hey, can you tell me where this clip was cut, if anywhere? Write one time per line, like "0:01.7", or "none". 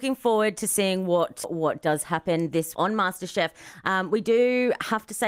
0:01.4
0:02.7